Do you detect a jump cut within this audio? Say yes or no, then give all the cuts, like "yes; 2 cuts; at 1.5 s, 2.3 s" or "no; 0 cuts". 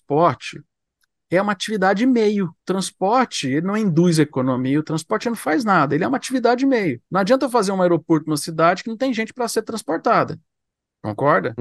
yes; 2 cuts; at 2.6 s, 7.1 s